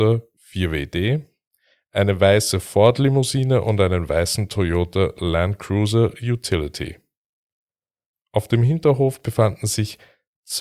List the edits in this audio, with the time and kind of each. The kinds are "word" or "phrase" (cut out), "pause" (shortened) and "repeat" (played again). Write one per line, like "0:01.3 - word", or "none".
none